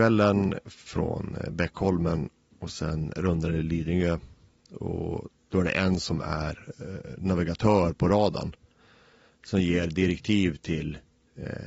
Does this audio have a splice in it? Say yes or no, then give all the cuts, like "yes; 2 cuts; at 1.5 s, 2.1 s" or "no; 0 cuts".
no; 0 cuts